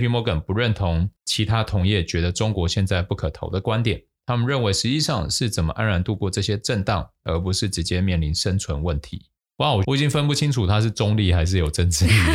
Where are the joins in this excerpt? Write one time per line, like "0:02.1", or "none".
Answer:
0:01.2
0:09.4